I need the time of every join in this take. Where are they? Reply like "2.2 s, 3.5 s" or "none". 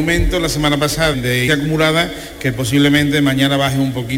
1.1 s, 1.5 s